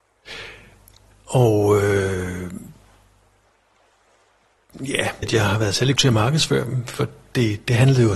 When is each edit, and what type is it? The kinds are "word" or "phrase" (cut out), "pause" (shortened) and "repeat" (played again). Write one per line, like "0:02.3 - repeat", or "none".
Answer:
0:05.2 - phrase
0:06.0 - word